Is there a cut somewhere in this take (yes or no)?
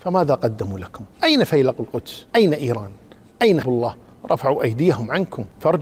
yes